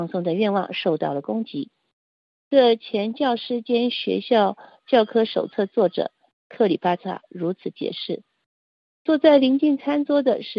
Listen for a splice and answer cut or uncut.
uncut